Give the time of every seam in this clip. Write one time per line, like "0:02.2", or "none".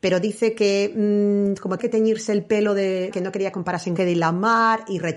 0:01.8
0:03.1
0:03.5
0:04.0